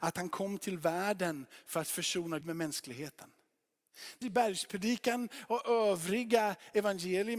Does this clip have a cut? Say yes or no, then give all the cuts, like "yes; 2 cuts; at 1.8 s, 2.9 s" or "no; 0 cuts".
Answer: yes; 2 cuts; at 2.4 s, 4.2 s